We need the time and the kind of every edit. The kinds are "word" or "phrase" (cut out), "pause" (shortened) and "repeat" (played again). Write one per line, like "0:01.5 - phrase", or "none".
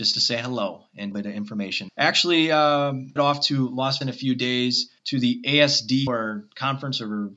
0:01.1 - phrase
0:01.9 - word
0:03.2 - phrase
0:04.0 - word
0:05.0 - pause
0:06.1 - word